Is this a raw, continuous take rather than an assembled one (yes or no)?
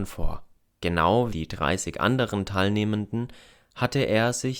no